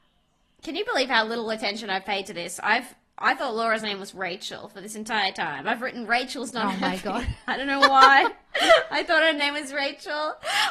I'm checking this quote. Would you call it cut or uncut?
uncut